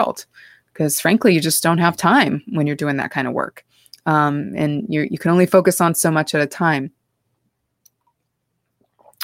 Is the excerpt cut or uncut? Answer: uncut